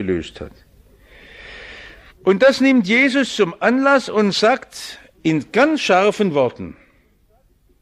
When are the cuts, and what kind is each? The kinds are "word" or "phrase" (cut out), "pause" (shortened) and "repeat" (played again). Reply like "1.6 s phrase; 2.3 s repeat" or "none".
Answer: 2.1 s pause